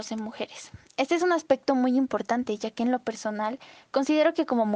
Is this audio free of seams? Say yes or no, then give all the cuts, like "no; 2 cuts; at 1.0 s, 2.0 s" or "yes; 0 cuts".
yes; 0 cuts